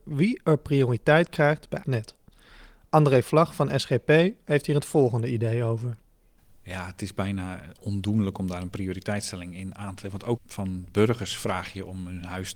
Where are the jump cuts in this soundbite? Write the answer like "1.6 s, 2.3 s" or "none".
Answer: 1.8 s, 10.4 s